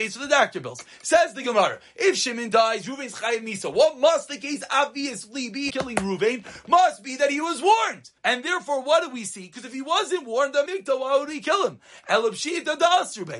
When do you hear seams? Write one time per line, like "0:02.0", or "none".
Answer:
0:05.7
0:08.2
0:10.7

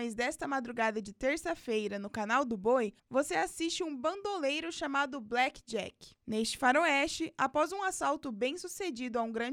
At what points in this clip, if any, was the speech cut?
0:03.0
0:06.2

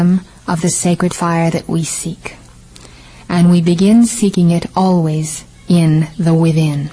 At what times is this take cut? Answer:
none

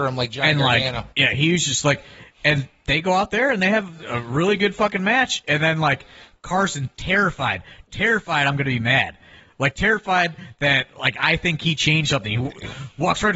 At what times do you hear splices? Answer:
0:01.1

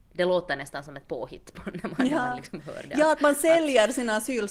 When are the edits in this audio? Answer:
none

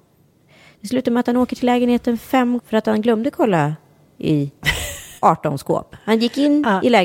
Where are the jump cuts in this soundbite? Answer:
0:02.6
0:05.2

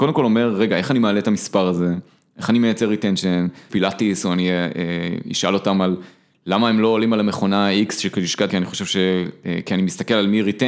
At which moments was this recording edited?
0:03.7
0:08.5

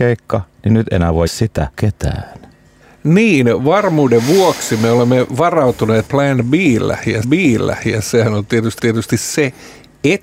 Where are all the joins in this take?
0:01.3
0:01.7
0:06.1
0:07.2
0:08.8

